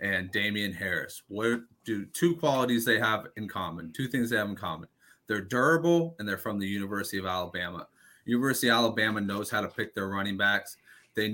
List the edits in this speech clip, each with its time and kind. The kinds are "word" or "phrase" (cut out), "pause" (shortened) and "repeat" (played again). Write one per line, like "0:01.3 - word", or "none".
none